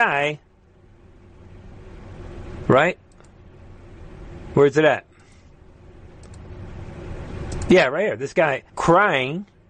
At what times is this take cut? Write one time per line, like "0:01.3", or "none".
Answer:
0:08.7